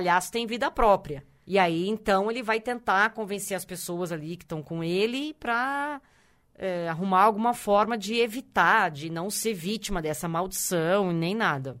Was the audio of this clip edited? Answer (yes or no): no